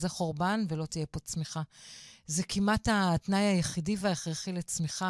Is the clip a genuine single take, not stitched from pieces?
yes; 0 cuts

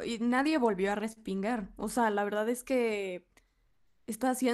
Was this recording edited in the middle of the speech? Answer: no; 0 cuts

